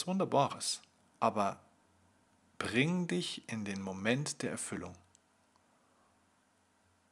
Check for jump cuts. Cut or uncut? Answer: cut